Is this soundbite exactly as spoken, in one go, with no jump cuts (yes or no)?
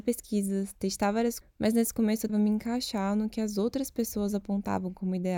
no